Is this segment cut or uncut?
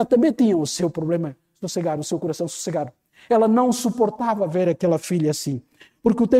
uncut